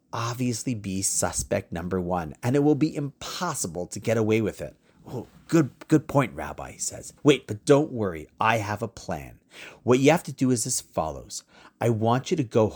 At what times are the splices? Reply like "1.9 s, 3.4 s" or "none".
7.2 s